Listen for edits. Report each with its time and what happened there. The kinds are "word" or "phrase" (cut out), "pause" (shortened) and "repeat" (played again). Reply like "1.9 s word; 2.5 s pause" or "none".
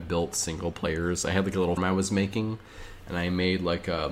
1.8 s word